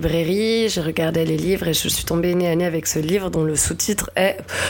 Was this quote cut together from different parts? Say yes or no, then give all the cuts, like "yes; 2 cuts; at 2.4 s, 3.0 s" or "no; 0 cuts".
no; 0 cuts